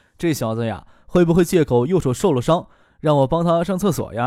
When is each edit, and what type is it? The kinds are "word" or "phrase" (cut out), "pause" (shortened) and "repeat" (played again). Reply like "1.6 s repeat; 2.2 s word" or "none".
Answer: none